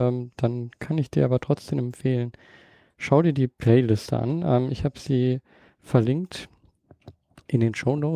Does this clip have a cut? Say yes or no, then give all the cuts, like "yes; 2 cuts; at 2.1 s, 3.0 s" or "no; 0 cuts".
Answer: no; 0 cuts